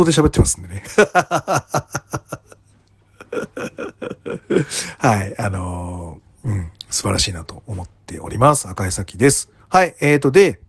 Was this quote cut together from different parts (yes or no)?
yes